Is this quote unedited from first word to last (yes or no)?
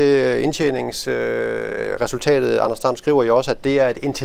yes